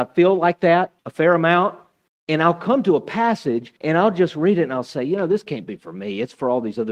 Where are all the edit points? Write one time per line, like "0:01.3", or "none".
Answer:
0:01.0
0:02.1
0:03.8